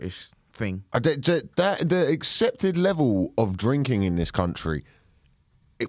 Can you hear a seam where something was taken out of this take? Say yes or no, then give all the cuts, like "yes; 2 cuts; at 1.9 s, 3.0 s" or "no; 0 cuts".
no; 0 cuts